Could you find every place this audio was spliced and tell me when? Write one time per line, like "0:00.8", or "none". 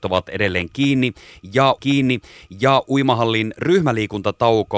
0:01.8